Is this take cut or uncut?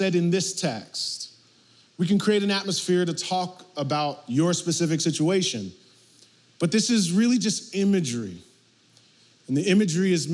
uncut